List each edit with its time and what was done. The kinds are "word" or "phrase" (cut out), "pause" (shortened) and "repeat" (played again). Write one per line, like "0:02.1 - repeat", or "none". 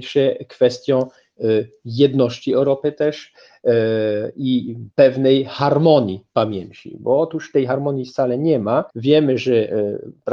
0:04.9 - pause
0:08.9 - pause